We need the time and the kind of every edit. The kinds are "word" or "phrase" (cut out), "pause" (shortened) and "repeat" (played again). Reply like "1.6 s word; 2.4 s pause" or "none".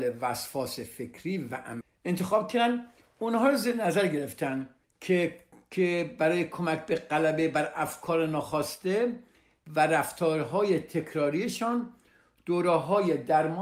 none